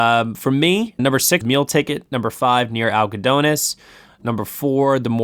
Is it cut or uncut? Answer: cut